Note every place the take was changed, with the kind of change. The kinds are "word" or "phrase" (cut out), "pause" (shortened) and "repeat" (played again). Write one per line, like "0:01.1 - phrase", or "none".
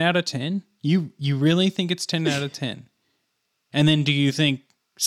none

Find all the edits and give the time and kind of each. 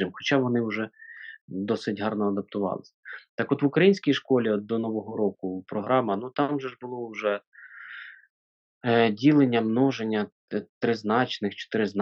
none

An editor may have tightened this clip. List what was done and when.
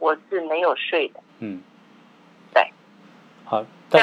0:01.3 - pause

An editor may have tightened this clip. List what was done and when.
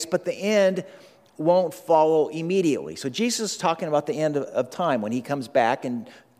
none

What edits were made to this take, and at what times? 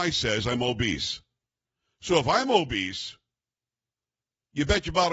none

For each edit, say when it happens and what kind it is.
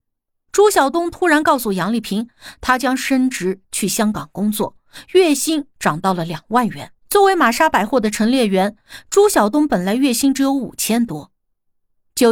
0:07.0 - pause

